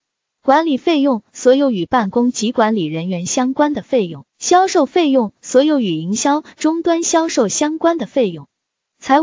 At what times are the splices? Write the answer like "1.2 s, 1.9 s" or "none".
4.3 s